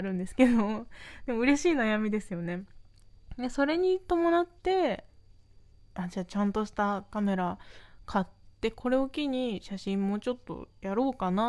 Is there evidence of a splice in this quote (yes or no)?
yes